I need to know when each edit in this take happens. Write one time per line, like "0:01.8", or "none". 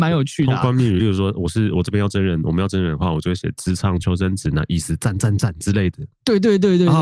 none